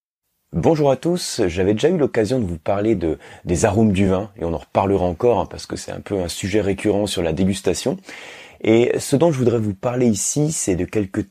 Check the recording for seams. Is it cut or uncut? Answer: uncut